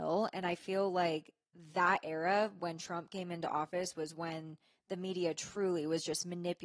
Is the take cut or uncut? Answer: uncut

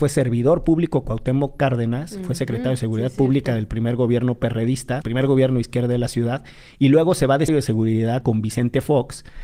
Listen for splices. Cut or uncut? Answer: cut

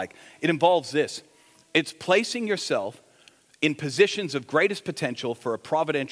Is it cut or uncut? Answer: uncut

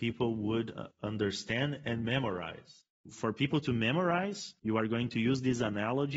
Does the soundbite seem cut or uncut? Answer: cut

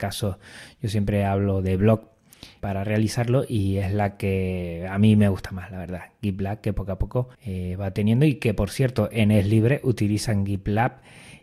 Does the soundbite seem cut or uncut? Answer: cut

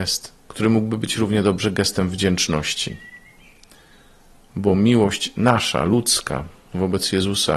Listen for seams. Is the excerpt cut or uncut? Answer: uncut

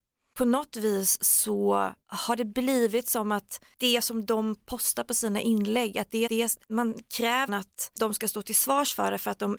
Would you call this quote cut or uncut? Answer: cut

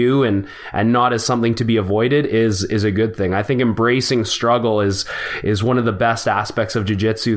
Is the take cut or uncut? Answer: uncut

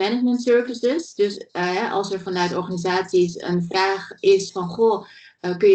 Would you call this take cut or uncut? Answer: uncut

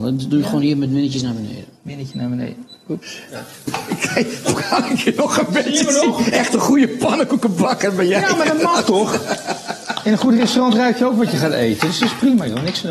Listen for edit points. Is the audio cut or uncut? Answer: uncut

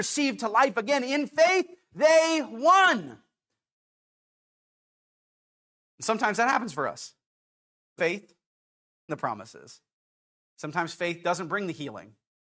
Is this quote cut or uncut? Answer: cut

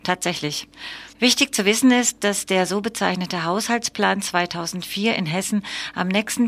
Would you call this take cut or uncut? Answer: cut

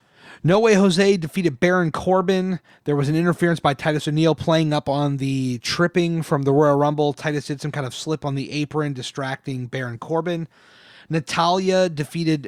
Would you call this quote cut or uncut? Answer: uncut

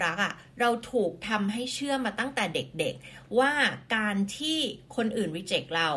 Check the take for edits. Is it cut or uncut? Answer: uncut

